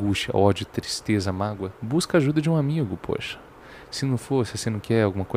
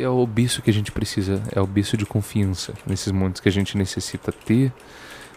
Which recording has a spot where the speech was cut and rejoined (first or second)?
first